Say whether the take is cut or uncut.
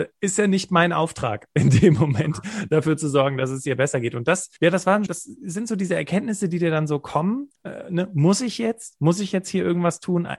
cut